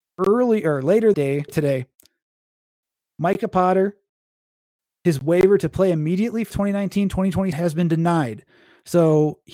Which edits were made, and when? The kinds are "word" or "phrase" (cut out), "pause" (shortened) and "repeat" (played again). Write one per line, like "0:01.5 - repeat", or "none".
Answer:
0:01.1 - word
0:01.5 - word
0:06.5 - word
0:07.5 - word

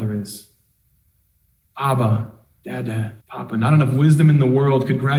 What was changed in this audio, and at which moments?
0:03.2 - pause

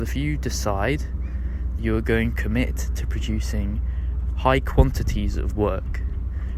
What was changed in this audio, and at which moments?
0:01.8 - word
0:02.3 - word

